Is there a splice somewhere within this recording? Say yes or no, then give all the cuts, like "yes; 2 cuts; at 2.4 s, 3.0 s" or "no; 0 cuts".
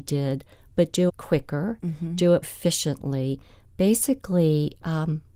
yes; 2 cuts; at 1.1 s, 2.4 s